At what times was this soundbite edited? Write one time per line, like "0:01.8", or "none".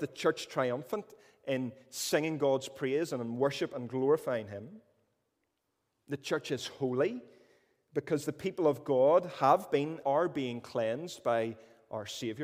0:10.0